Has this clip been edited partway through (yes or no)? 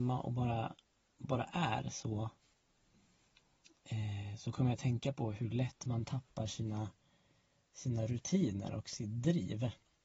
no